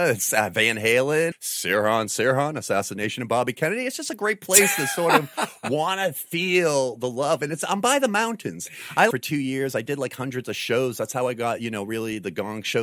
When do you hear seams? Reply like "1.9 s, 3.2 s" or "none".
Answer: 1.3 s, 9.1 s